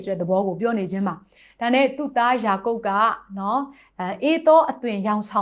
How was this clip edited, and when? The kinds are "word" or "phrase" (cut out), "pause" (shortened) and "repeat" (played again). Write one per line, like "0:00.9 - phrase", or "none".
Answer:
none